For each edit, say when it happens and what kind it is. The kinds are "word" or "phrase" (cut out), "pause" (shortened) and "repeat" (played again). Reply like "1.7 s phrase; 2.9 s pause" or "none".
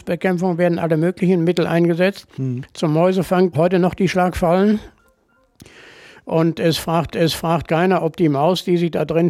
3.5 s phrase; 7.1 s repeat